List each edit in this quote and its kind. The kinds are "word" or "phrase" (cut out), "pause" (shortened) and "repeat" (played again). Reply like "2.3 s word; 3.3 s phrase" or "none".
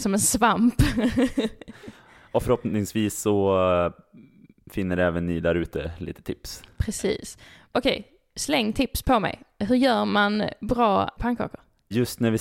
none